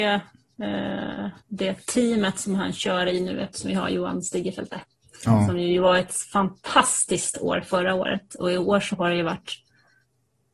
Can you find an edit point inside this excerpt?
no; 0 cuts

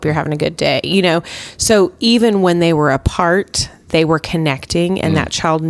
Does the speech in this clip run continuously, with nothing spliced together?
yes; 0 cuts

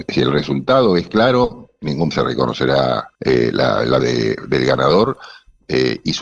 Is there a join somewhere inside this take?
yes; 3 cuts; at 2.1 s, 3.1 s, 4.0 s

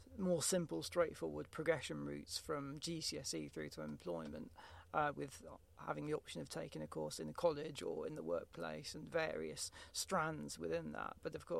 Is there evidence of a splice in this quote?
no; 0 cuts

